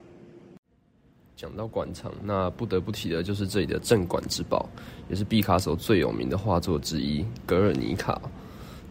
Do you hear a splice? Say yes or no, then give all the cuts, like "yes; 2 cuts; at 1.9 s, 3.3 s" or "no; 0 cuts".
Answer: no; 0 cuts